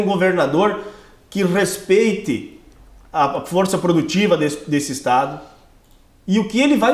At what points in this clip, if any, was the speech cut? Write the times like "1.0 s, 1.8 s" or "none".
none